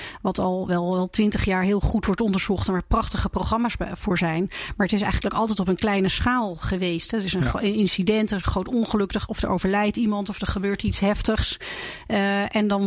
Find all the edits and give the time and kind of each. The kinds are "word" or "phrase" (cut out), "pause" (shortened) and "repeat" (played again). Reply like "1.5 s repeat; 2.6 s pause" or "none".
none